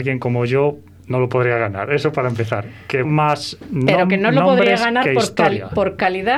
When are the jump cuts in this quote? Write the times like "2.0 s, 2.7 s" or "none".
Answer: 3.0 s